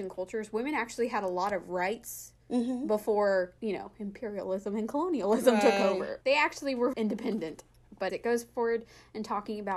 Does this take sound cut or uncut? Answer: cut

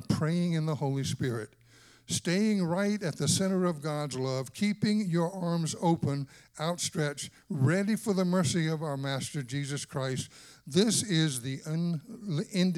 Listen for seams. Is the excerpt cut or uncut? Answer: uncut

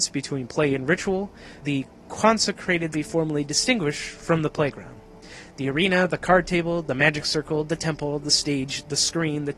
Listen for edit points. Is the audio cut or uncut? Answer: cut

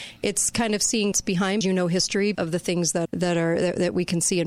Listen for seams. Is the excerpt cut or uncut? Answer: cut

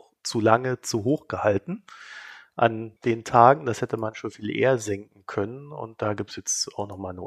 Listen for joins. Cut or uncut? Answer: cut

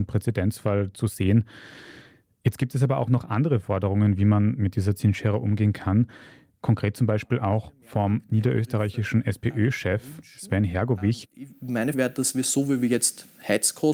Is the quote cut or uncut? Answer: cut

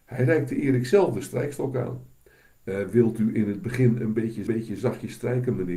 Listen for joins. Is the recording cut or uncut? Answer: cut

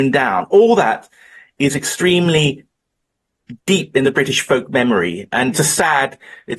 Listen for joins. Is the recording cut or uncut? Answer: cut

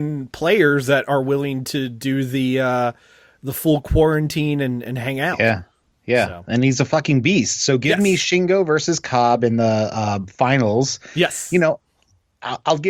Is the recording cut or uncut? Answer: uncut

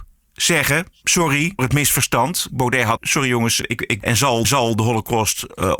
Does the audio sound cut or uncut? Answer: cut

